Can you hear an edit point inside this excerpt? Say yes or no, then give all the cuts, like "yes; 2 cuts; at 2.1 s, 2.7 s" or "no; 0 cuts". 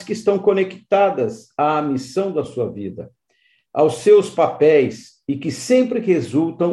no; 0 cuts